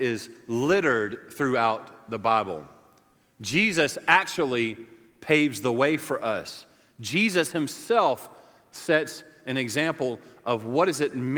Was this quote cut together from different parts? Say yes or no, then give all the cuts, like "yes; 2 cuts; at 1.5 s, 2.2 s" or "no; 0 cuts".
no; 0 cuts